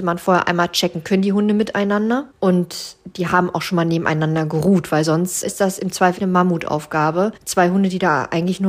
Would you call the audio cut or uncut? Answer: cut